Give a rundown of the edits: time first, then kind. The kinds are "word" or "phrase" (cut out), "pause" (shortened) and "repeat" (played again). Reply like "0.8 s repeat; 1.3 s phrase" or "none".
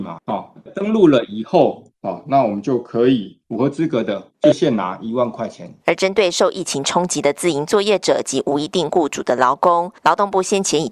5.8 s pause